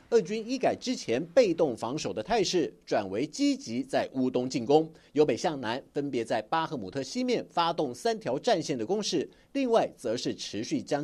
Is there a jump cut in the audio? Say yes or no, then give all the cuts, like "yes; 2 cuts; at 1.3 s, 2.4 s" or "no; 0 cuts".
no; 0 cuts